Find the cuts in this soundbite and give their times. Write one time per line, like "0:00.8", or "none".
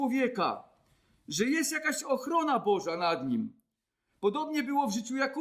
none